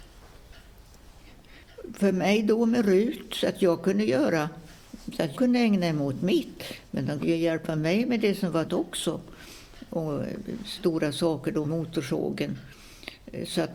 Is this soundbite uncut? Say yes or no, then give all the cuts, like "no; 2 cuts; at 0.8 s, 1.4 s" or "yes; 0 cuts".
no; 4 cuts; at 5.3 s, 7.2 s, 8.7 s, 11.6 s